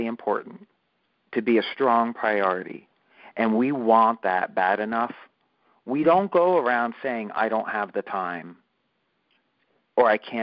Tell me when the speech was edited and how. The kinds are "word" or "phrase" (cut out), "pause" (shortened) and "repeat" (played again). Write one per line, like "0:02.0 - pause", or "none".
none